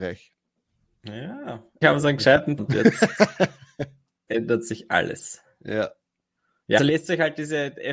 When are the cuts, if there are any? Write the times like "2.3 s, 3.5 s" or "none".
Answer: 1.8 s, 2.6 s, 4.3 s, 6.8 s